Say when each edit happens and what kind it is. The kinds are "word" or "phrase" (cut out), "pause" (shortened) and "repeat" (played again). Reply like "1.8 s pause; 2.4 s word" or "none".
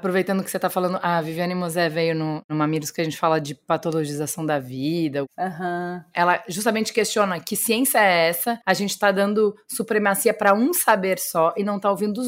8.6 s pause